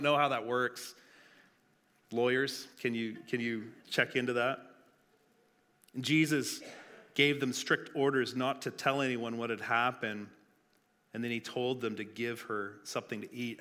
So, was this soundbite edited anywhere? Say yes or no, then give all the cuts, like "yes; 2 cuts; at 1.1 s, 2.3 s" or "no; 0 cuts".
yes; 1 cut; at 3.8 s